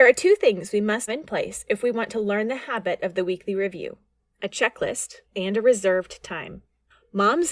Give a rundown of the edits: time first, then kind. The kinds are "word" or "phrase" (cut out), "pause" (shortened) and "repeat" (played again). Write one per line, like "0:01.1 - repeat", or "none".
0:01.1 - word
0:05.2 - pause